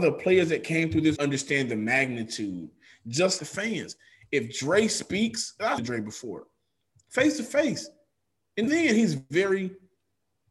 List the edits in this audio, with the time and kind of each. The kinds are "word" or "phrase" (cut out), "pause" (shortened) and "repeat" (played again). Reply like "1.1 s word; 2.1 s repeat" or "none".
1.2 s word; 3.4 s word; 5.8 s word; 8.7 s word